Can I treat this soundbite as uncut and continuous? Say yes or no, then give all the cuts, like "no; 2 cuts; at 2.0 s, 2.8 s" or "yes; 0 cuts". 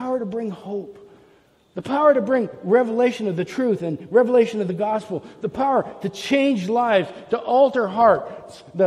yes; 0 cuts